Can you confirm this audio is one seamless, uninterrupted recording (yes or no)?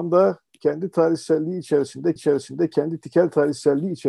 no